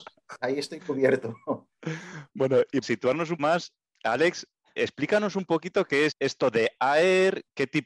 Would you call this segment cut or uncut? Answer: cut